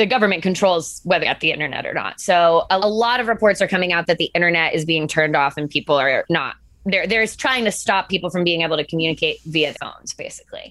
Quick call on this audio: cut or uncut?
cut